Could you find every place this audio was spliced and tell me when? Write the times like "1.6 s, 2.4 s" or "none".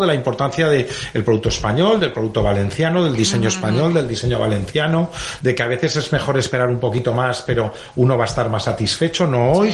none